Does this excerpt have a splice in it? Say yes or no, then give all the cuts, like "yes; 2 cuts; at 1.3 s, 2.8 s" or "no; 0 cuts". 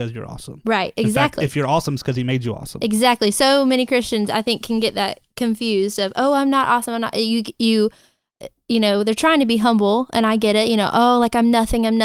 no; 0 cuts